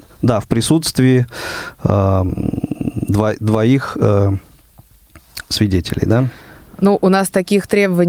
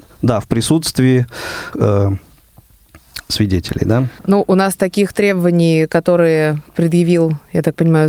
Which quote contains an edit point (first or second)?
second